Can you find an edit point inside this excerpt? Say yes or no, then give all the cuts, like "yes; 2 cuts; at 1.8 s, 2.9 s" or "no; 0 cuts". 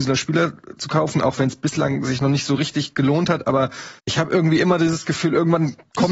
yes; 1 cut; at 4.0 s